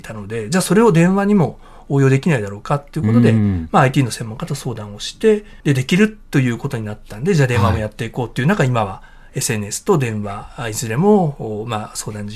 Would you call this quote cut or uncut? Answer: cut